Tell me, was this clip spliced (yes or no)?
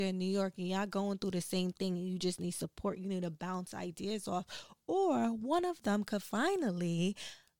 no